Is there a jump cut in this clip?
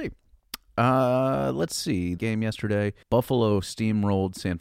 yes; 2 cuts; at 2.2 s, 3.0 s

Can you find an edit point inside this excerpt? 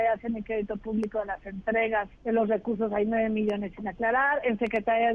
yes; 1 cut; at 2.1 s

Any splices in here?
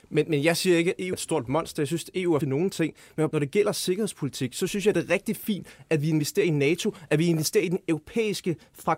yes; 3 cuts; at 1.1 s, 2.4 s, 3.3 s

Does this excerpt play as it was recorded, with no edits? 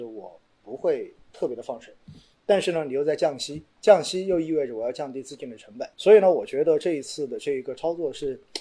no; 2 cuts; at 1.2 s, 5.9 s

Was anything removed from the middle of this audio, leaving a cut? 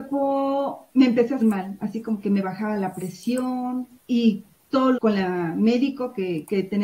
yes; 4 cuts; at 0.9 s, 1.4 s, 4.0 s, 4.9 s

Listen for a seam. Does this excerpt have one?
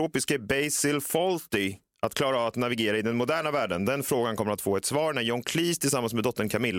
no; 0 cuts

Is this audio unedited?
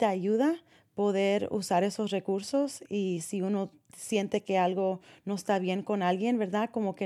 yes; 0 cuts

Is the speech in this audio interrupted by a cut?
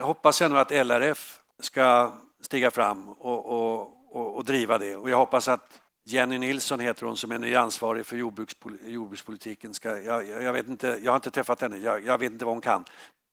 yes; 2 cuts; at 1.5 s, 5.9 s

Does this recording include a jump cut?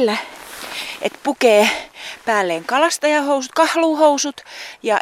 no; 0 cuts

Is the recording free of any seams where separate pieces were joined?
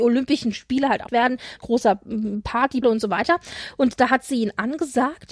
no; 3 cuts; at 1.1 s, 1.6 s, 2.8 s

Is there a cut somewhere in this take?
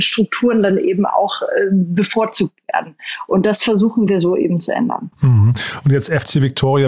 no; 0 cuts

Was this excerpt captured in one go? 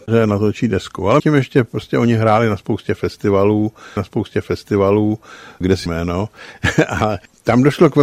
no; 3 cuts; at 1.2 s, 4.0 s, 5.9 s

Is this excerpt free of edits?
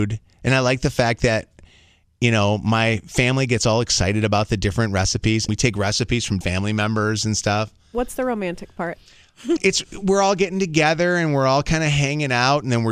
no; 3 cuts; at 5.5 s, 6.4 s, 9.6 s

